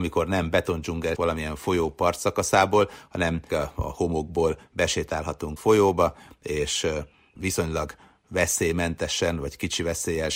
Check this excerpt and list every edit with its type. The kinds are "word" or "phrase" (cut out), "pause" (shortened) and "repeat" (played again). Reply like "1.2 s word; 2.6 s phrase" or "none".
1.2 s word; 3.5 s word; 5.6 s word; 7.4 s word

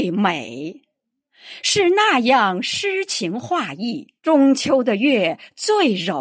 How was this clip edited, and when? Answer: 4.2 s pause

